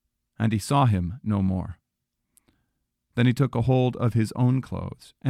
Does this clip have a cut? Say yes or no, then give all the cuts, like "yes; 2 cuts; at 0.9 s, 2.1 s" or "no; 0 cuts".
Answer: no; 0 cuts